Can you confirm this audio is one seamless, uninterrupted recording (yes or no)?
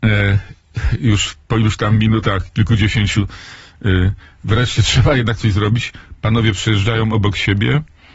yes